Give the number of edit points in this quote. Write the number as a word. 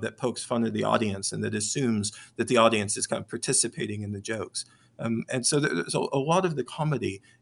zero